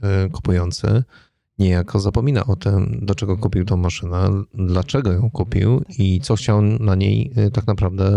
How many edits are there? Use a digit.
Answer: 0